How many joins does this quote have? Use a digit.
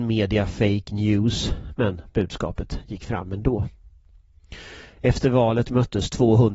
0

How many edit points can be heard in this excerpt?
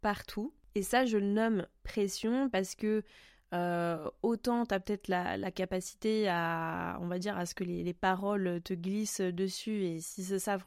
0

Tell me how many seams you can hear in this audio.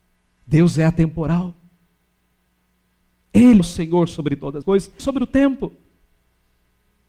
3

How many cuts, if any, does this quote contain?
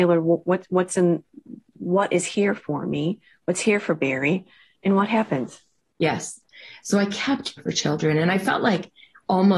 1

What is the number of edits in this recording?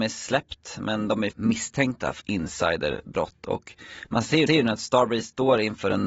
3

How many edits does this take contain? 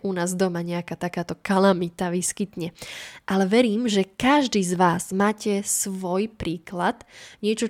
0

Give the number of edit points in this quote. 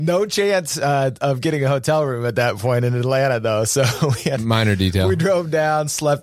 0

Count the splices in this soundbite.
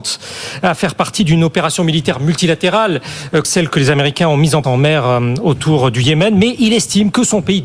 2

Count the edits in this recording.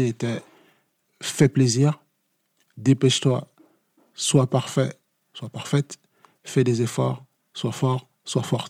0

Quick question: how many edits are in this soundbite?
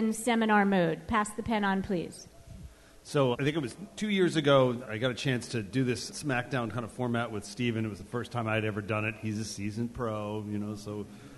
3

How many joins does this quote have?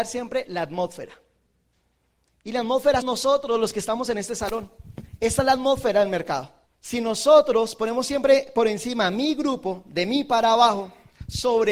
2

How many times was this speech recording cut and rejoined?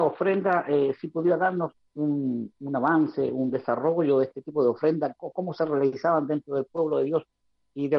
1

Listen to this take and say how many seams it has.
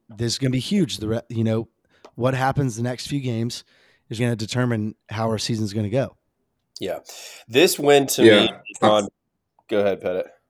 2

